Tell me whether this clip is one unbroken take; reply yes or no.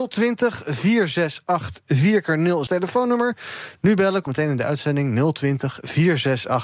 no